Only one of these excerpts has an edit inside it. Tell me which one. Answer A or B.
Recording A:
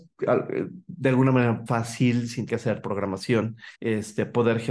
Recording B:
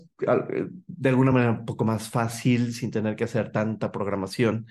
A